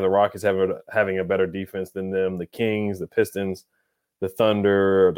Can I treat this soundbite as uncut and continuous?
yes; 0 cuts

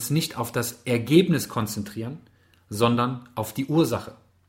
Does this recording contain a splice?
no; 0 cuts

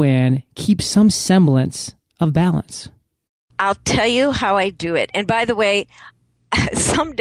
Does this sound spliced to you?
no; 0 cuts

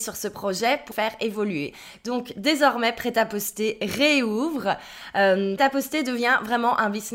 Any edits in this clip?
yes; 2 cuts; at 0.9 s, 5.6 s

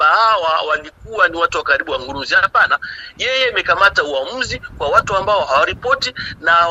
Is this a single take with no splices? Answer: yes; 0 cuts

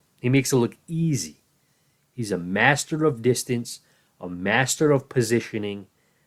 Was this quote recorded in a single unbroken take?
yes; 0 cuts

